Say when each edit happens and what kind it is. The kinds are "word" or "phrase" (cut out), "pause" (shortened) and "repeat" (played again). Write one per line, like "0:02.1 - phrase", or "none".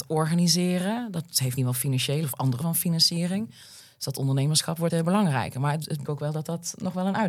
0:01.6 - word
0:02.2 - word
0:02.6 - word
0:04.9 - word
0:06.0 - word